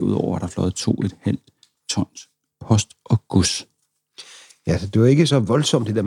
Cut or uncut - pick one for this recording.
uncut